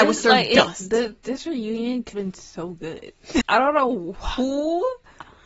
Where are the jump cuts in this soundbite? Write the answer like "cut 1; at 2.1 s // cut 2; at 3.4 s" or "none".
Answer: cut 1; at 2.1 s // cut 2; at 3.4 s